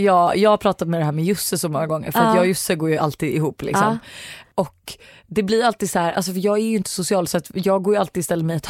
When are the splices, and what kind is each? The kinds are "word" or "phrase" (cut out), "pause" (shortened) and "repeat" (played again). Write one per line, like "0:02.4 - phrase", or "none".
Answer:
none